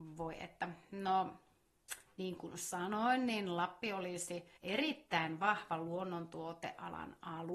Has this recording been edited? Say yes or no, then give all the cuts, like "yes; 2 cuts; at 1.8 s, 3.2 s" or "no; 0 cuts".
yes; 1 cut; at 4.6 s